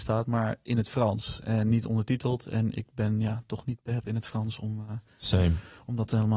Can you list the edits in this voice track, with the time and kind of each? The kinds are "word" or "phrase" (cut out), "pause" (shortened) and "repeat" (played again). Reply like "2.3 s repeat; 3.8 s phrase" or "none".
4.0 s word